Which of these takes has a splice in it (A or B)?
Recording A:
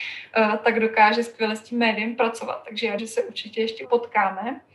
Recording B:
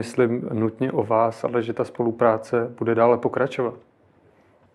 A